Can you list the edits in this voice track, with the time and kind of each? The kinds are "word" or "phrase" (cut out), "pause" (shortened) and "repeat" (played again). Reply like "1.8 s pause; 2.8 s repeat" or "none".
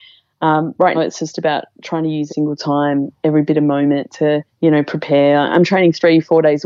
0.9 s word; 2.3 s word; 4.5 s pause